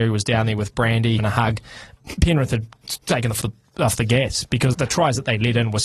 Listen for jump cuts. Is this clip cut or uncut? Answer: cut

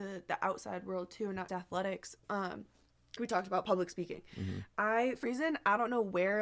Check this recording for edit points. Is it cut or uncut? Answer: cut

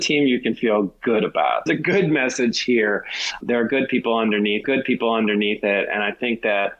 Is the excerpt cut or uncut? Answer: cut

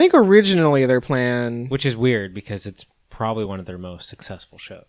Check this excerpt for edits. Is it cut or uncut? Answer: uncut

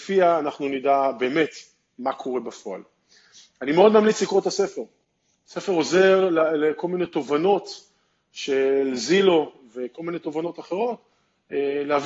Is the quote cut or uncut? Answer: uncut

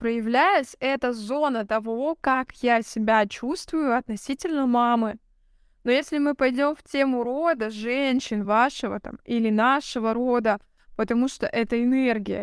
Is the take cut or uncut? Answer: uncut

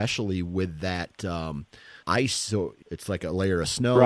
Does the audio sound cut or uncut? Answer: cut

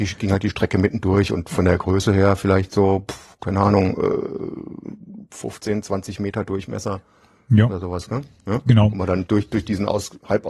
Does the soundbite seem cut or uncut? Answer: uncut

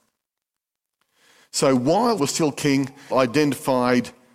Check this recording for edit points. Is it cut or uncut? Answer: cut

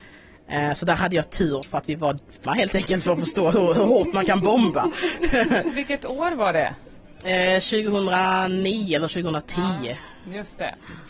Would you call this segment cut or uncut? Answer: cut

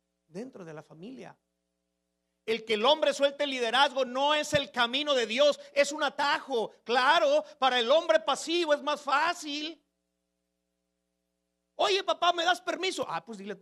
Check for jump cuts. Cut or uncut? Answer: uncut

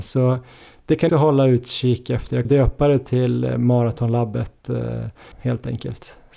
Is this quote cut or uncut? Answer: cut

